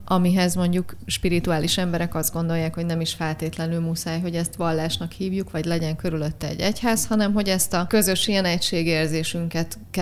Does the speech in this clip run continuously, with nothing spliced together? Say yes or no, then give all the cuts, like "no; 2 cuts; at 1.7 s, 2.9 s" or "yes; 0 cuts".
yes; 0 cuts